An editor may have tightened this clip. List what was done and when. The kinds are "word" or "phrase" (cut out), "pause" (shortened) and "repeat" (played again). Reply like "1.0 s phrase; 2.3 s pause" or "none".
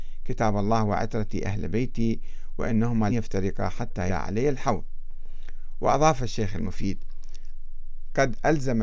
3.1 s word; 4.1 s word